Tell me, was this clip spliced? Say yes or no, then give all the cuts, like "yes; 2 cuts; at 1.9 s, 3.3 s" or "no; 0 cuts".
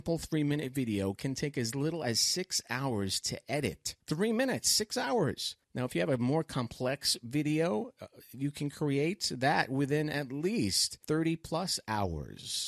yes; 3 cuts; at 4.0 s, 5.6 s, 11.0 s